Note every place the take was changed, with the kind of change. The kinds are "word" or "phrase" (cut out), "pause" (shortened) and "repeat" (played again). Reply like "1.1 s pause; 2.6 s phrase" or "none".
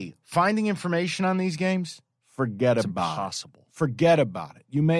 none

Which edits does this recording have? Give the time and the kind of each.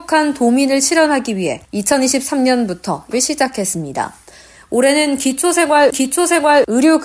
1.6 s pause; 3.1 s word; 5.9 s repeat

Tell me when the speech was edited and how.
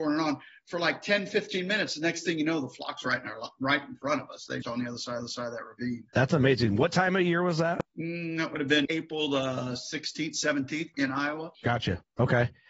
4.6 s word; 5.2 s repeat; 6.1 s pause; 7.9 s pause; 8.8 s word; 10.9 s word; 11.5 s pause

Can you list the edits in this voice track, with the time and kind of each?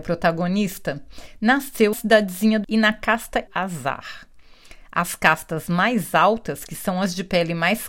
1.9 s word; 2.6 s word; 3.5 s phrase

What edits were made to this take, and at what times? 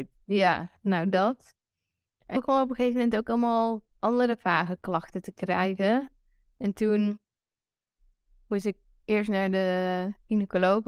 2.3 s word

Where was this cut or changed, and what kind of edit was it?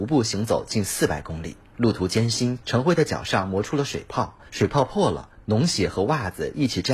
2.6 s phrase

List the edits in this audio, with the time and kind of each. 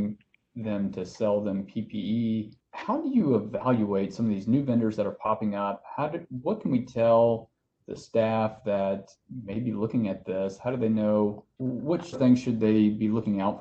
12.1 s word

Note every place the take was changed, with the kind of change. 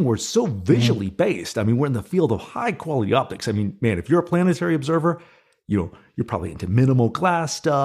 none

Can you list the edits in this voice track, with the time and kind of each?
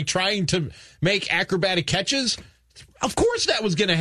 none

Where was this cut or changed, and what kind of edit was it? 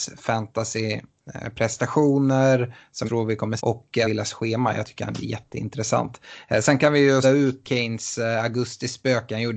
3.1 s word; 3.6 s word; 4.0 s word; 5.2 s word; 7.2 s word; 7.6 s word

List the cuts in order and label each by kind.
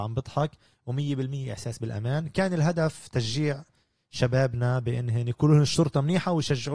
none

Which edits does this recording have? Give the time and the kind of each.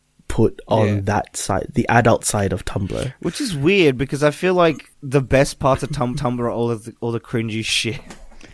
4.9 s pause; 6.1 s repeat

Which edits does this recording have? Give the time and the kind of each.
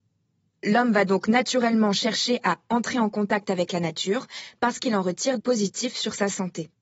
5.4 s phrase

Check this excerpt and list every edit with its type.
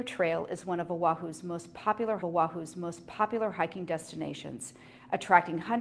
2.2 s repeat

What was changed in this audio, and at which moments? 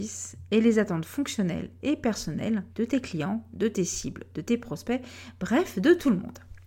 2.7 s pause

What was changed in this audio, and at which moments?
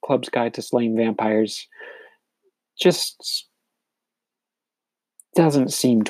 none

